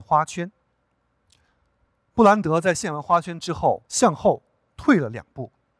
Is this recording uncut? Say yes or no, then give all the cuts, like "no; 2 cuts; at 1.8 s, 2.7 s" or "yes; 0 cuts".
no; 1 cut; at 3.9 s